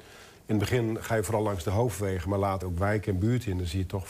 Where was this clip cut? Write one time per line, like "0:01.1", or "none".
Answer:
0:02.6